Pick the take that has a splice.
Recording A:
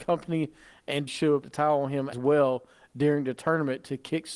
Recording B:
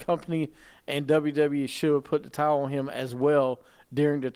A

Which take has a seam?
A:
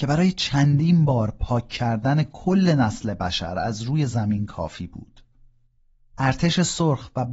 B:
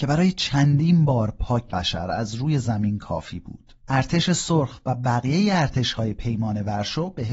B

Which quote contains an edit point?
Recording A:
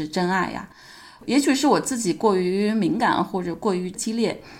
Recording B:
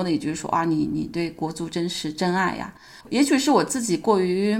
B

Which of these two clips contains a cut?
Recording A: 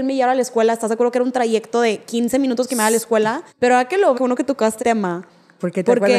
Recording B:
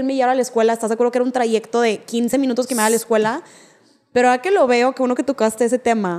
A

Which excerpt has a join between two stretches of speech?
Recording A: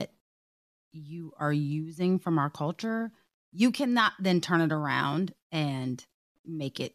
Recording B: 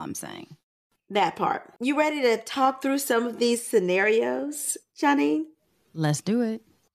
B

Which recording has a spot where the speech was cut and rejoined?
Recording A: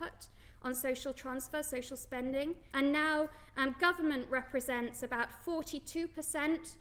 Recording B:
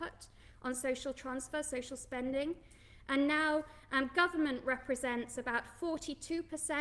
A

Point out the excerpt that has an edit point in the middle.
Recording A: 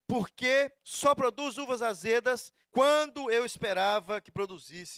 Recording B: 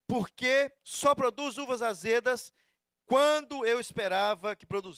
A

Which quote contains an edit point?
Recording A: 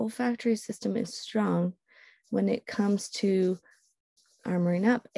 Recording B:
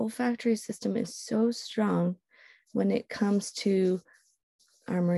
A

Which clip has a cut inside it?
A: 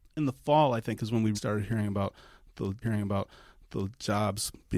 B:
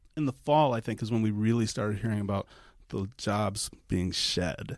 A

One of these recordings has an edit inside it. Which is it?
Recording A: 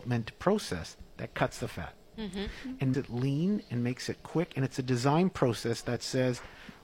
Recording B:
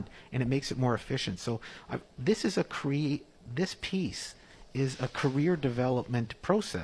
A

